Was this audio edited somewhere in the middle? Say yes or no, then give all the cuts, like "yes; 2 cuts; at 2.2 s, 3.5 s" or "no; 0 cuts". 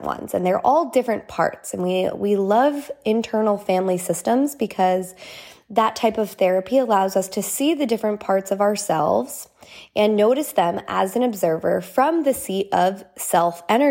no; 0 cuts